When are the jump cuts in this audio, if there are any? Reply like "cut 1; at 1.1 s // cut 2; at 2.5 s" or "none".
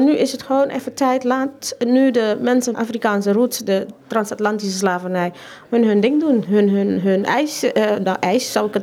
cut 1; at 2.7 s